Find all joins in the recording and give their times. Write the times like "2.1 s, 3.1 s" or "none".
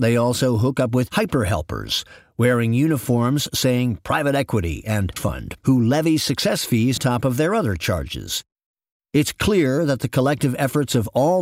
5.2 s, 7.0 s